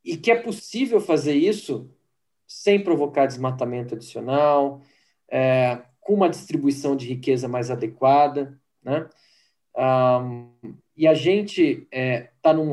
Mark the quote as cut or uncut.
uncut